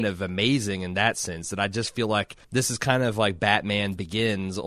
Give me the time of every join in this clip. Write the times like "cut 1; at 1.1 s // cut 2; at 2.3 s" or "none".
cut 1; at 2.4 s